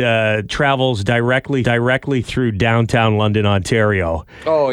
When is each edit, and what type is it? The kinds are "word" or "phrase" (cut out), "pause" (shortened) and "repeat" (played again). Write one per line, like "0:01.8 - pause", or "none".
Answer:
0:01.6 - repeat